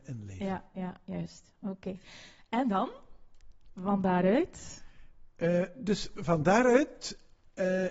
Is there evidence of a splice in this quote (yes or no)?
no